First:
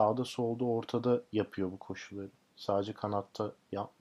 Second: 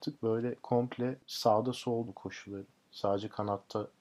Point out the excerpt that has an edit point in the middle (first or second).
second